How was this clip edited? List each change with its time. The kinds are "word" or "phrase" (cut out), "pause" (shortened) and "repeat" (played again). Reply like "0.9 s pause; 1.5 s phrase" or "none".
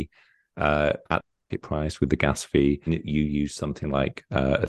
2.9 s word